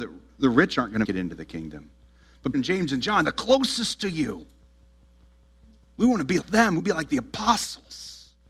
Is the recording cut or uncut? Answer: cut